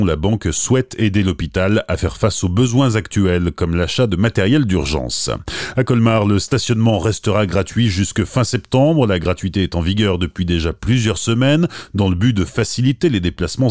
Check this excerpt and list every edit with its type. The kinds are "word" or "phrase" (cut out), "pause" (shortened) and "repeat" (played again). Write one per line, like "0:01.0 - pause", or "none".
none